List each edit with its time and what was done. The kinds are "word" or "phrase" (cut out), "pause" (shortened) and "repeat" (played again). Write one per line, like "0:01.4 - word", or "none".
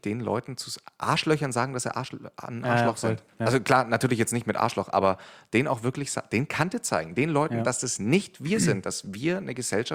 none